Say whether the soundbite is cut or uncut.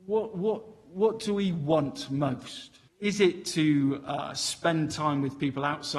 cut